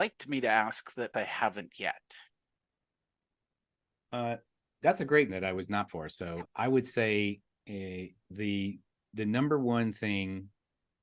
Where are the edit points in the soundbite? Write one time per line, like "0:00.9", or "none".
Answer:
0:01.1
0:05.3
0:05.9
0:06.4
0:08.3
0:09.1